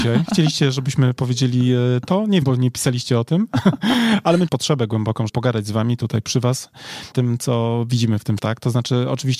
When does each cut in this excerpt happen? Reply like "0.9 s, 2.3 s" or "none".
2.4 s, 4.5 s, 5.3 s, 7.1 s, 8.4 s